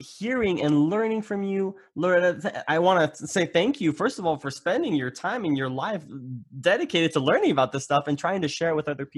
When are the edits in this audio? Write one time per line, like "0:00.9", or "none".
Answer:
none